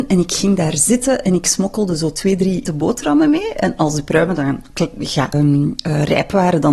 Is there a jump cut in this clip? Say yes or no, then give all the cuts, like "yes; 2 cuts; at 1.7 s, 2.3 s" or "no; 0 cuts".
yes; 2 cuts; at 2.6 s, 5.3 s